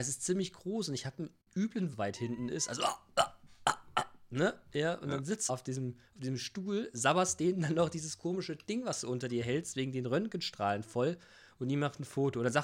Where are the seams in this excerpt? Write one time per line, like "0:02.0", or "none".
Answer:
0:01.9
0:05.5